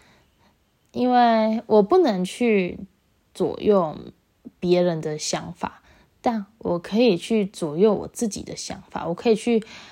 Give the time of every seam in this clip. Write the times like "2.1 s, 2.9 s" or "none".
none

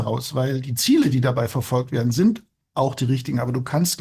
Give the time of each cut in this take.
none

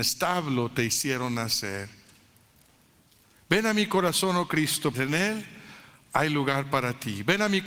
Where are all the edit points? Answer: 4.9 s

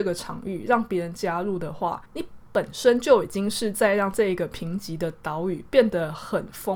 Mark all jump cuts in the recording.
2.1 s

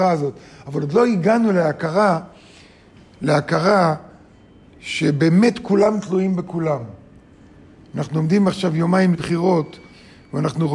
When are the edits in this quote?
9.1 s

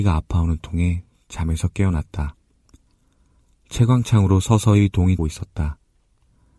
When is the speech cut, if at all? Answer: 5.2 s

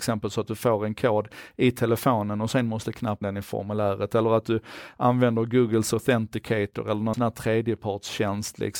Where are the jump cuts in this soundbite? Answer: 3.2 s, 7.1 s

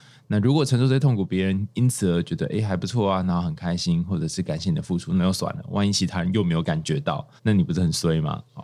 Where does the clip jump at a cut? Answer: 7.4 s

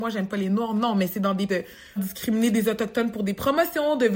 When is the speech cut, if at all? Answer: 1.5 s, 2.0 s

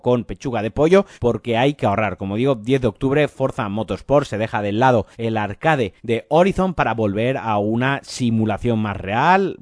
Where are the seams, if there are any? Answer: 1.1 s, 5.1 s, 6.0 s

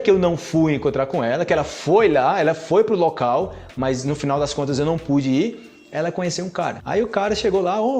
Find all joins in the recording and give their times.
none

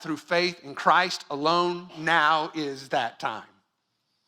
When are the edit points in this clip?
none

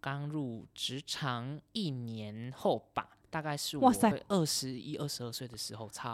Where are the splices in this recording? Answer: 1.7 s, 4.1 s

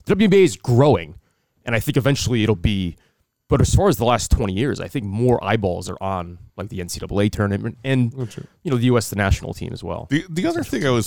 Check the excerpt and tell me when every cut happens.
none

